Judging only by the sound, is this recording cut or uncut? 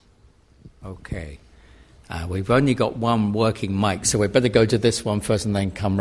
uncut